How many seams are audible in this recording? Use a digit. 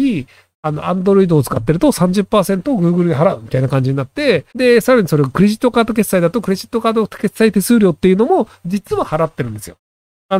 1